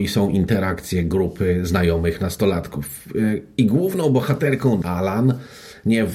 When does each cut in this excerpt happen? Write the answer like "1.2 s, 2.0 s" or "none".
4.8 s